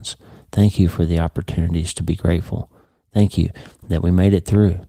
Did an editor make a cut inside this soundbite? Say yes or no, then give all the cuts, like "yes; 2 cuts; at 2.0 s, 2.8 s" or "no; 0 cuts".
no; 0 cuts